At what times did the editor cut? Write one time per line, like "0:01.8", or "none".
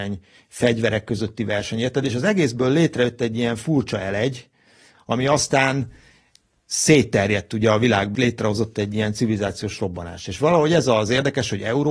0:08.1